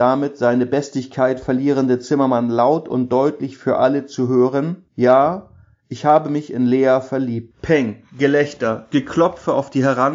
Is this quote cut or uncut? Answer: cut